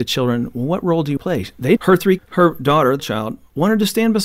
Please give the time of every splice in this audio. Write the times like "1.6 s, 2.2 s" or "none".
1.2 s, 1.8 s, 2.2 s, 3.0 s

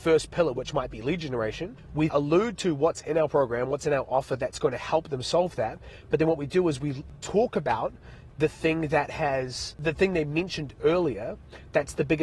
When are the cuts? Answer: 2.1 s, 7.1 s

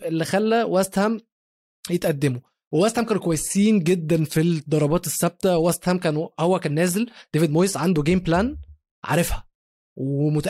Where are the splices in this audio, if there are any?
none

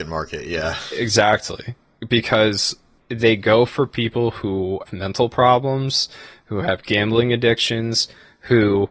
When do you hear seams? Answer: 3.0 s, 4.9 s

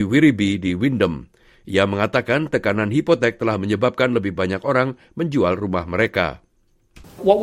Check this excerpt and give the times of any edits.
none

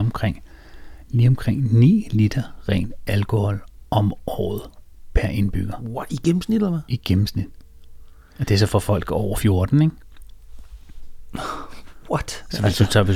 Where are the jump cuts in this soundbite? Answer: none

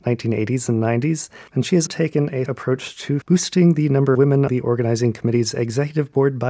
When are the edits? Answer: 1.5 s, 1.9 s, 2.5 s, 3.2 s, 4.1 s, 4.5 s

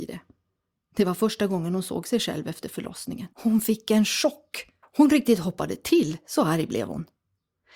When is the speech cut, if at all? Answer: 3.3 s, 4.8 s

